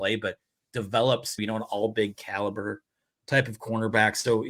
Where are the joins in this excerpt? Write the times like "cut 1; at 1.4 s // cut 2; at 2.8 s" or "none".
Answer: cut 1; at 1.4 s // cut 2; at 2.1 s